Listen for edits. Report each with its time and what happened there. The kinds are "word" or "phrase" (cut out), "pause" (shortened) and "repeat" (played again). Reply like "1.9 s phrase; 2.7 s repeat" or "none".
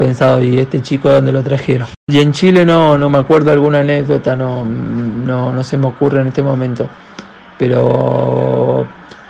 none